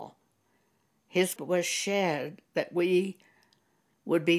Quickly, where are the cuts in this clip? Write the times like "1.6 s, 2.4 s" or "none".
1.4 s